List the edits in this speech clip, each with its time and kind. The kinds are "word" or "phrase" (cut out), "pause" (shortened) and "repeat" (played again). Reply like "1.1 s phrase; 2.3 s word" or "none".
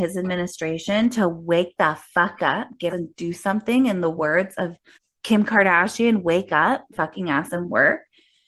2.9 s phrase; 4.9 s pause; 6.9 s phrase